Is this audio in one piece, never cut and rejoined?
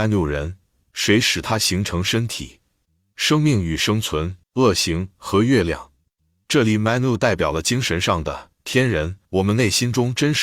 no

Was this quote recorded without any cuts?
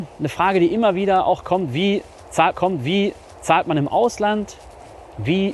no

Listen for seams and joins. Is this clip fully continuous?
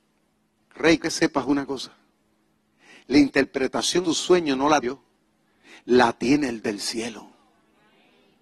no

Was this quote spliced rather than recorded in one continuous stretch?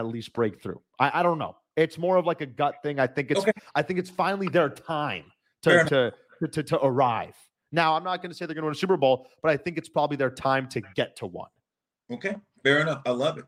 no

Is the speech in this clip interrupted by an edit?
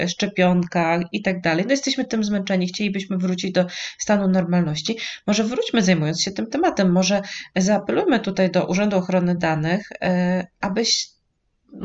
no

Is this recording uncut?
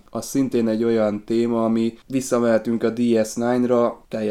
yes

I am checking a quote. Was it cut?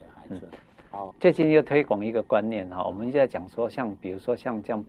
yes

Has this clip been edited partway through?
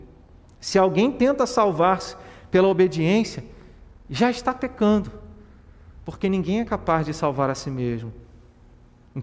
no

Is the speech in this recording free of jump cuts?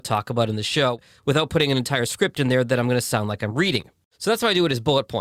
yes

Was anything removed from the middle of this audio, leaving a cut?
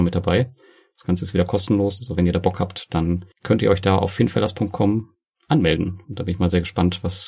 yes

